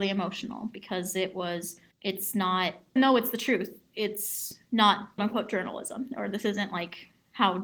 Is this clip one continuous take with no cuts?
no; 3 cuts; at 1.9 s, 3.0 s, 5.2 s

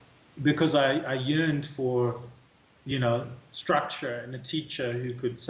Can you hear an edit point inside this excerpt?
no; 0 cuts

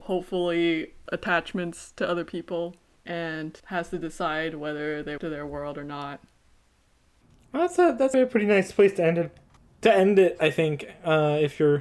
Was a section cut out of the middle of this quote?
yes; 4 cuts; at 1.0 s, 3.6 s, 5.2 s, 8.1 s

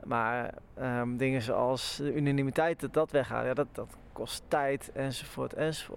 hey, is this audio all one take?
yes; 0 cuts

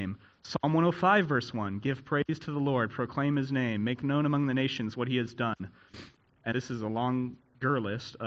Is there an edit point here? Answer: yes; 1 cut; at 6.5 s

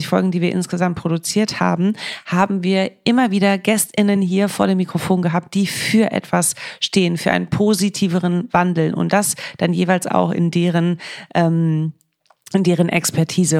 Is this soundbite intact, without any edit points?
yes; 0 cuts

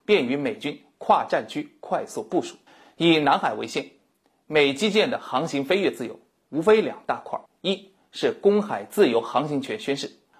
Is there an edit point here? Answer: yes; 2 cuts; at 2.7 s, 7.5 s

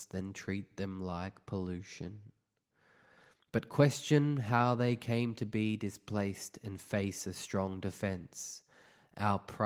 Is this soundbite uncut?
yes; 0 cuts

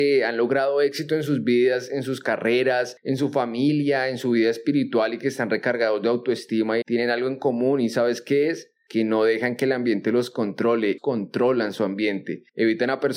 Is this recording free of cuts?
no; 2 cuts; at 6.8 s, 11.0 s

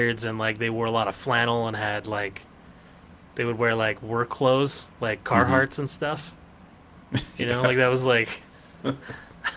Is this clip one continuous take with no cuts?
yes; 0 cuts

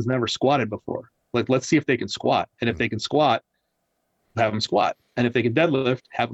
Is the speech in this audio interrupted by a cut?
no; 0 cuts

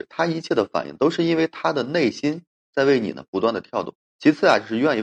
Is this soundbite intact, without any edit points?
no; 1 cut; at 4.0 s

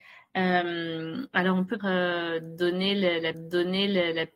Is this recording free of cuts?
no; 2 cuts; at 1.8 s, 3.3 s

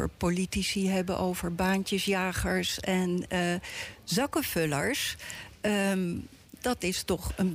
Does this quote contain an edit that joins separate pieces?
no; 0 cuts

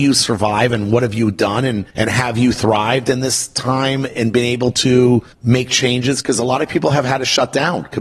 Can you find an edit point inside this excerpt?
yes; 2 cuts; at 1.9 s, 5.3 s

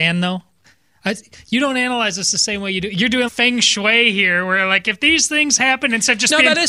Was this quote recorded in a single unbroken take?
no; 1 cut; at 3.3 s

